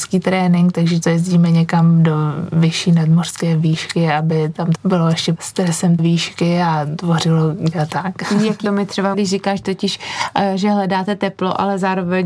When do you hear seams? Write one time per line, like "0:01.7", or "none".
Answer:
0:01.0
0:04.8
0:05.4
0:06.0
0:07.7
0:08.6
0:09.1